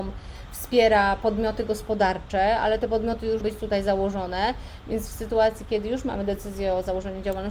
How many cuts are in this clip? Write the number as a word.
one